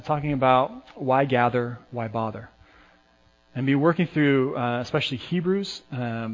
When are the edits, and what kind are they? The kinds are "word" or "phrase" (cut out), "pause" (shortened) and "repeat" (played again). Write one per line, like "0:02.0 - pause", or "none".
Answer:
none